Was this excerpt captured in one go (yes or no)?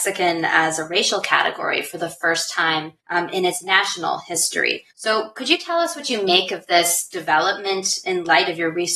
no